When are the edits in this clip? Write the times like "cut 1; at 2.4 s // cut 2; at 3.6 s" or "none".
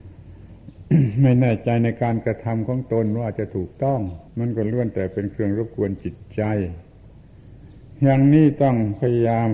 cut 1; at 4.3 s